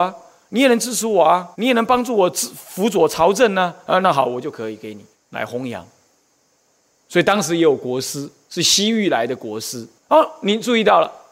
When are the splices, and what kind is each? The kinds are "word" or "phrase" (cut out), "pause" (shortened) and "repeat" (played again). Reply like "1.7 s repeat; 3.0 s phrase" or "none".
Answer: 1.5 s pause; 5.1 s pause; 10.0 s pause